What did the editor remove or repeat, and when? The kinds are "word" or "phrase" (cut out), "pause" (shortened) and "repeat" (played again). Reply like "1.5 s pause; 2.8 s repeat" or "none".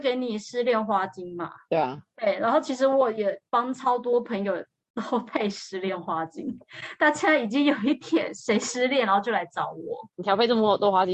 3.5 s pause; 10.1 s pause

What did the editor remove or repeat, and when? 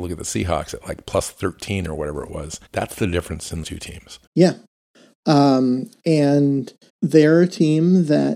2.7 s pause; 3.6 s word; 4.3 s pause; 6.9 s pause

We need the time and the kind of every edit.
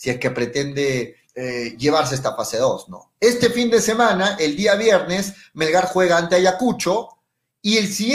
1.2 s pause

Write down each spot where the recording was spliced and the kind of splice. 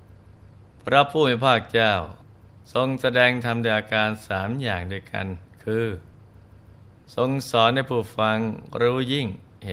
2.6 s pause

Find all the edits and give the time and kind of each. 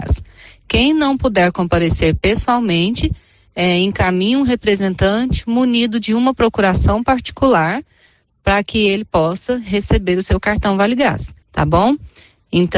11.4 s pause

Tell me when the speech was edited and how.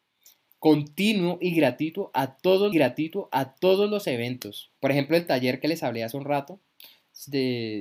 2.7 s repeat; 4.8 s pause

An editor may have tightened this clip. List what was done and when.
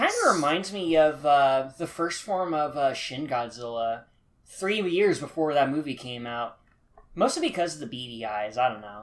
none

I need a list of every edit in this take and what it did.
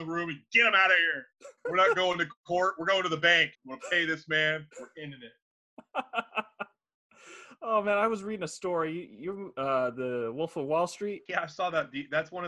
1.6 s pause; 3.5 s pause; 4.7 s pause; 11.3 s pause

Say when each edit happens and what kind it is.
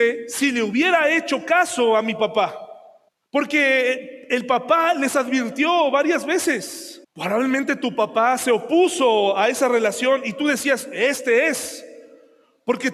3.1 s pause; 7.0 s pause

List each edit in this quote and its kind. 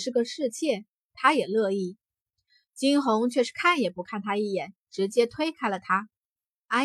4.8 s pause

